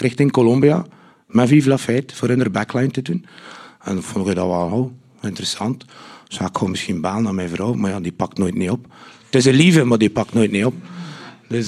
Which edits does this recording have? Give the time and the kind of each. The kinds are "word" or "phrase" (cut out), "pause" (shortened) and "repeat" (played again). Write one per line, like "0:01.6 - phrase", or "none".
none